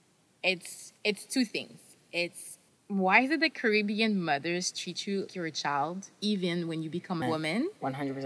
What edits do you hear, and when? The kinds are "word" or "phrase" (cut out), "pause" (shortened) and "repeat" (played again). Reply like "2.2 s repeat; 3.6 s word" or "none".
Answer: 1.0 s pause; 2.7 s pause; 5.3 s word; 7.2 s phrase